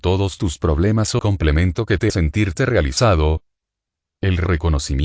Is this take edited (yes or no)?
yes